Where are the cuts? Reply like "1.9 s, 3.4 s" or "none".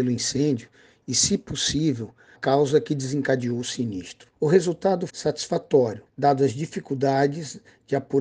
2.3 s, 4.3 s, 5.1 s, 6.1 s